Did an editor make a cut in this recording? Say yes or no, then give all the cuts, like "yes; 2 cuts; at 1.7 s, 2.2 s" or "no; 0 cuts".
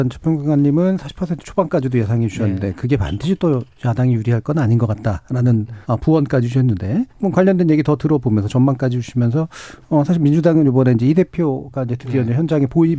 yes; 2 cuts; at 5.8 s, 7.1 s